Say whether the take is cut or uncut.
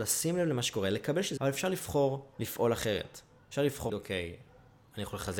cut